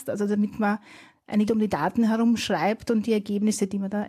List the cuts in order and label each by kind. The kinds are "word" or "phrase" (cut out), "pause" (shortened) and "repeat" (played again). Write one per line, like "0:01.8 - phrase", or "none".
0:01.5 - word

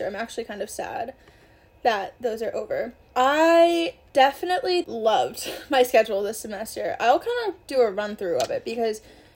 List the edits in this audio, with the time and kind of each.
none

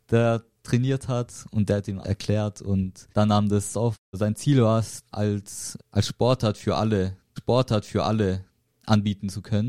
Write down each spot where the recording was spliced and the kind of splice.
0:02.0 - word
0:03.1 - pause
0:03.7 - phrase
0:05.1 - word
0:05.8 - word
0:07.4 - repeat

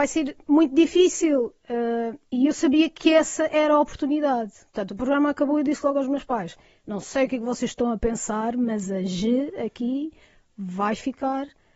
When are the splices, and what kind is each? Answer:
none

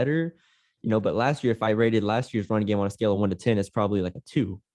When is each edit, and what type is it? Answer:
none

